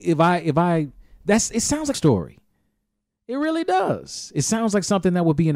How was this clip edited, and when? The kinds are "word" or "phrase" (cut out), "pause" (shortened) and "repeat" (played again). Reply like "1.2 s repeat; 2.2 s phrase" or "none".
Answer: 1.9 s phrase